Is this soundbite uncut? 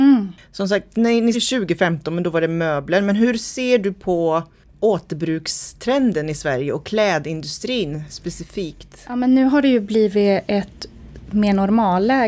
no; 1 cut; at 1.3 s

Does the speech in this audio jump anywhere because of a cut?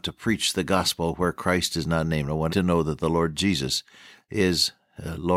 yes; 1 cut; at 2.5 s

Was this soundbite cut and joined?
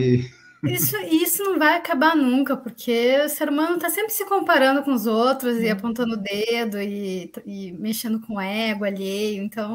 no; 0 cuts

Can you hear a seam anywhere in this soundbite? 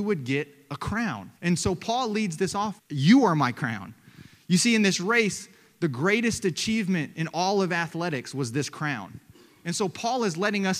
yes; 2 cuts; at 1.4 s, 2.8 s

